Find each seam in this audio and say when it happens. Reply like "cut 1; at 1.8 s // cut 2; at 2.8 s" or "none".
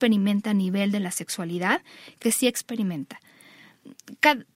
cut 1; at 2.2 s